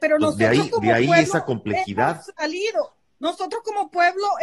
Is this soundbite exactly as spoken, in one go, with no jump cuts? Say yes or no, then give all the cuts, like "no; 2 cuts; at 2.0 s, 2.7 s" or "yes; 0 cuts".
yes; 0 cuts